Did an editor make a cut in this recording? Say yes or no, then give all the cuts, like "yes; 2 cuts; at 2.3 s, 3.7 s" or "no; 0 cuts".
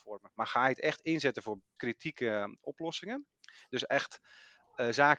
yes; 1 cut; at 1.8 s